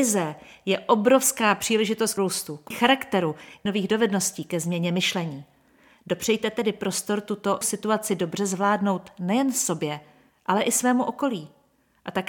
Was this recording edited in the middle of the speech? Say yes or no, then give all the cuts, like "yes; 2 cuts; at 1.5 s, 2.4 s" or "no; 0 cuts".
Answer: yes; 4 cuts; at 2.2 s, 2.7 s, 3.7 s, 7.6 s